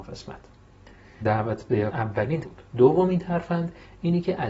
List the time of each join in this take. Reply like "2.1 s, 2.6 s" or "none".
1.2 s, 1.9 s, 2.4 s